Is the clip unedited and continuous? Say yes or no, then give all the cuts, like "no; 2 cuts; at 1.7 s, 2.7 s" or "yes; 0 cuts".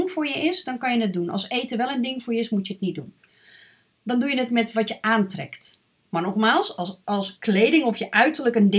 yes; 0 cuts